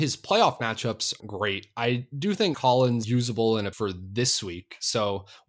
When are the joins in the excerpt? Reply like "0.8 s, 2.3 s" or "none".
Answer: 1.2 s, 2.5 s, 3.0 s, 3.7 s